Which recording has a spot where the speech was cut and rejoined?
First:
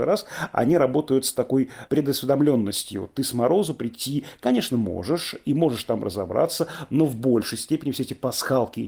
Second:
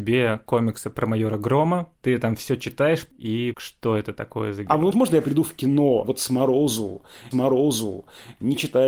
second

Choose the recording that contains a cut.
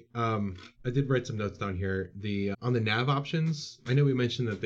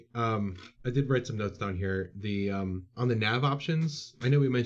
first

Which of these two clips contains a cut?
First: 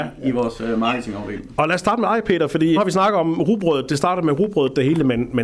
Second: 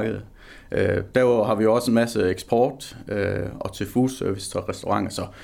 first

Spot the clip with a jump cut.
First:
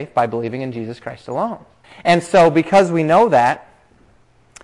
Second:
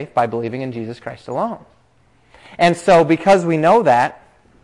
first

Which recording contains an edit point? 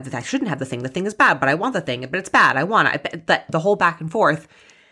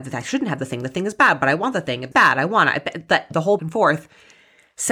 second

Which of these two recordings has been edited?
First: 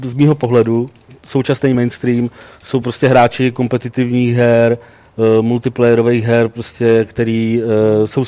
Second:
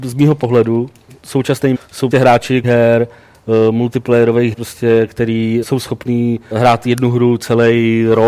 second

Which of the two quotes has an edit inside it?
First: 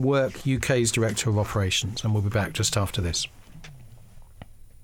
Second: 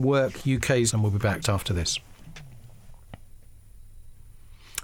second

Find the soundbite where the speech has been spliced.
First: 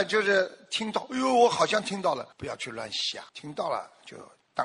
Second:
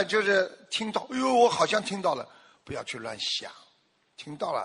first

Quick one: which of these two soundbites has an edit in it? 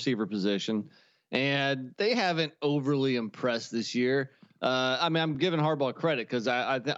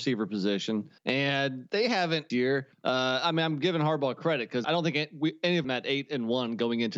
second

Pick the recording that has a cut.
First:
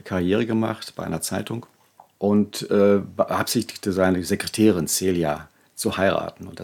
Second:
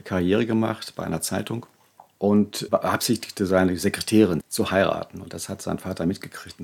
second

